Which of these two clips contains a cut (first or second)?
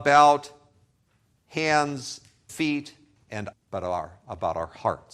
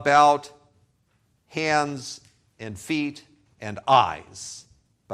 first